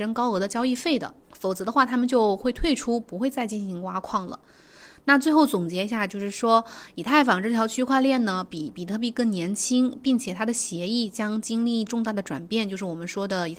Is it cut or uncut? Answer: cut